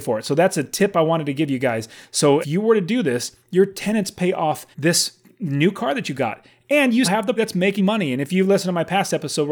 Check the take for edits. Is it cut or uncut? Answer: cut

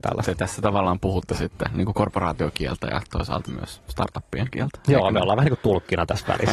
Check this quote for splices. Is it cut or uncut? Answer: cut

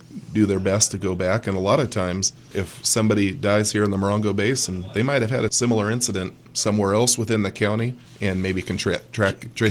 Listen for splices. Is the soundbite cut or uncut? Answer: uncut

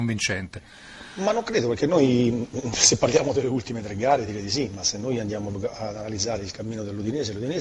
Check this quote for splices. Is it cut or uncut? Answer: uncut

